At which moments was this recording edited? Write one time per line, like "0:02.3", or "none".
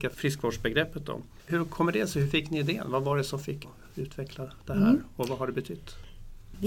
0:03.6

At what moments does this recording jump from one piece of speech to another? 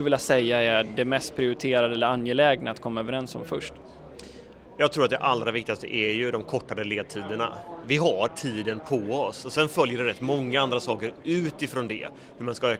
0:08.3

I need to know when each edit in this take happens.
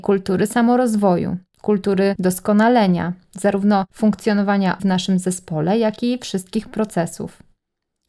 0:04.8

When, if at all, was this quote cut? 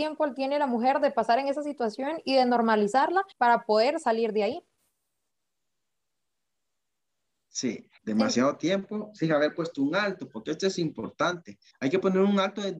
0:03.3
0:08.0
0:11.7

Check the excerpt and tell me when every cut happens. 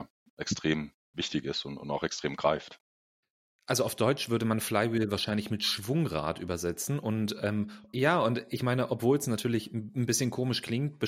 none

